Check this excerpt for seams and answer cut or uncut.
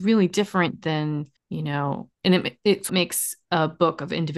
cut